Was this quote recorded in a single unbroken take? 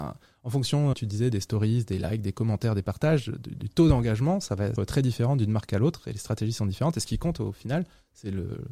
no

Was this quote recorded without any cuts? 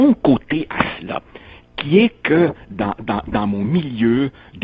yes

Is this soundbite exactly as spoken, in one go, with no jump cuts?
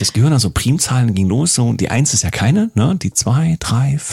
yes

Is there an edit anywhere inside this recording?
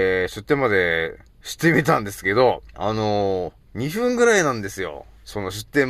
yes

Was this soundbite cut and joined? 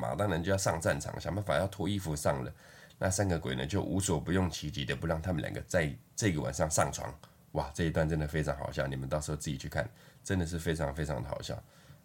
no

